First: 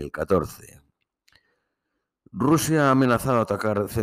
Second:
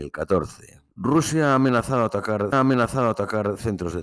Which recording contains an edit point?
second; 2 cuts; at 0.9 s, 2.5 s

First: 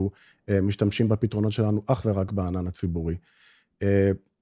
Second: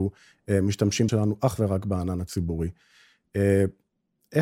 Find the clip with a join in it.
second; 1 cut; at 1.1 s

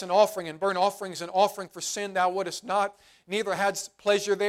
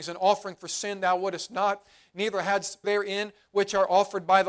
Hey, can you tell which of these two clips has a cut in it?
second; 1 cut; at 2.8 s

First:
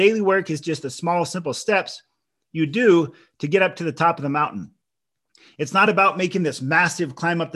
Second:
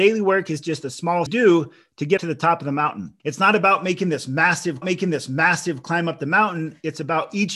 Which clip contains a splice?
second; 4 cuts; at 1.3 s, 2.2 s, 3.2 s, 4.8 s

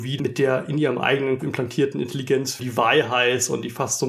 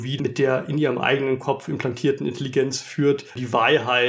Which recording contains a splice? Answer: first; 2 cuts; at 1.4 s, 2.6 s

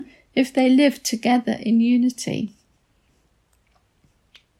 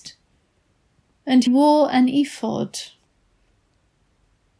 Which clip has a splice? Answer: second; 1 cut; at 1.5 s

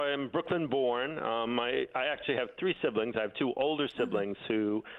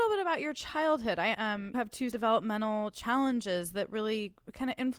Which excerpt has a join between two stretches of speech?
second; 3 cuts; at 1.3 s, 1.7 s, 2.1 s

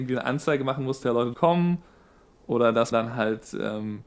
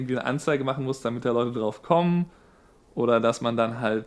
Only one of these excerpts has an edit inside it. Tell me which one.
first; 3 cuts; at 1.0 s, 1.3 s, 2.9 s

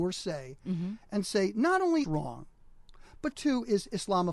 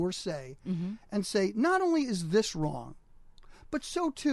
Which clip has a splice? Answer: first; 2 cuts; at 2.0 s, 3.3 s

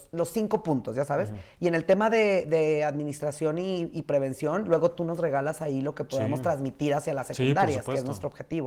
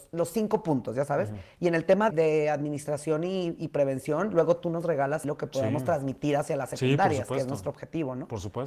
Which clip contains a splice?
second; 2 cuts; at 2.1 s, 5.2 s

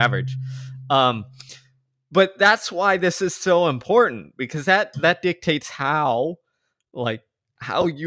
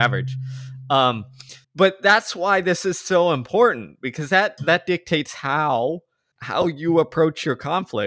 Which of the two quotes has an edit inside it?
second; 2 cuts; at 1.6 s, 6.3 s

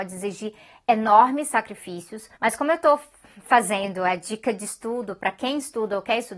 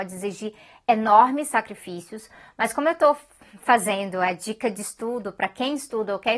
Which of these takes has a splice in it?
first; 1 cut; at 2.3 s

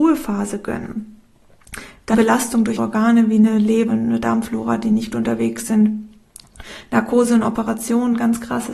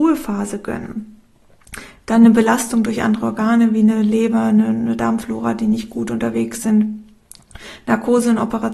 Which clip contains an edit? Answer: first; 4 cuts; at 2.1 s, 2.8 s, 3.9 s, 5.1 s

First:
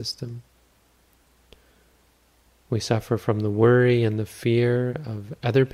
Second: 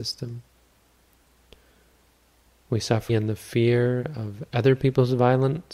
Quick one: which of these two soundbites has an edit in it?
second; 1 cut; at 3.1 s

